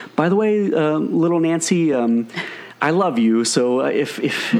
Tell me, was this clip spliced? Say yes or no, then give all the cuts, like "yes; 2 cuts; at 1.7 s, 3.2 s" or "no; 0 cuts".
no; 0 cuts